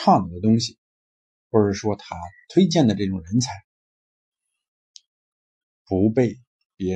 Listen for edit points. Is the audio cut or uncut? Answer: uncut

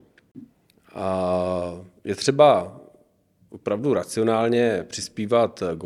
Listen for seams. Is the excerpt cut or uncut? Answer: uncut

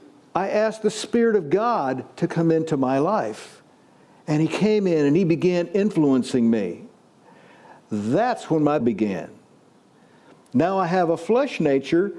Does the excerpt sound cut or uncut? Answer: cut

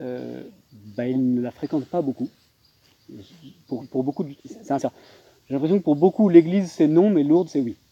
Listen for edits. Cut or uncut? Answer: cut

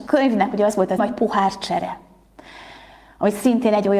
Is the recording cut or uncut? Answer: cut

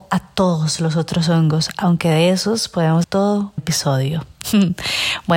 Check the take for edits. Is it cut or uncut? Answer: cut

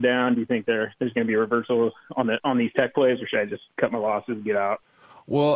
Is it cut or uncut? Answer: uncut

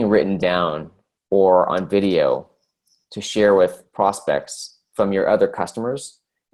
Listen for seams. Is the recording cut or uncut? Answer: cut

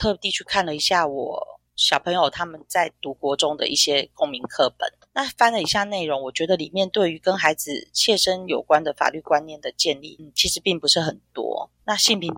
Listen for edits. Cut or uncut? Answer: cut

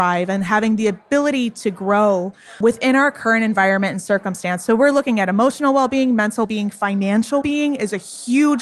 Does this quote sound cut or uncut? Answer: cut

